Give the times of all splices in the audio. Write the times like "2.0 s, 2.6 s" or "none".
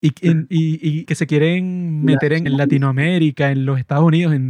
1.1 s, 2.5 s